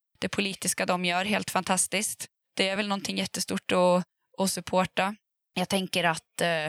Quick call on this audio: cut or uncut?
uncut